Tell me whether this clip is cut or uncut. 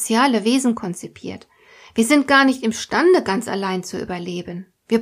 uncut